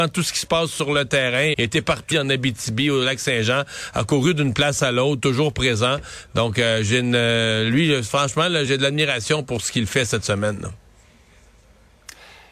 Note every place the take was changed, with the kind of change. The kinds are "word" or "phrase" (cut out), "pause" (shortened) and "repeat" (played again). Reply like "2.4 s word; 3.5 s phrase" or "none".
1.5 s word; 2.1 s word; 8.7 s word